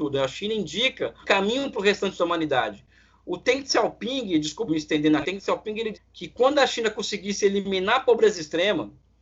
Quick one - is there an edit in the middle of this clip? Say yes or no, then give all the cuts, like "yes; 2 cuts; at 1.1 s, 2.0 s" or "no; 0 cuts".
yes; 4 cuts; at 1.2 s, 4.7 s, 5.2 s, 5.9 s